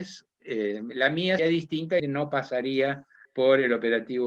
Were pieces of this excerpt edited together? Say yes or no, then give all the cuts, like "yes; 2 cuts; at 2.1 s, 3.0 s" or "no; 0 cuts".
yes; 3 cuts; at 1.4 s, 2.0 s, 3.3 s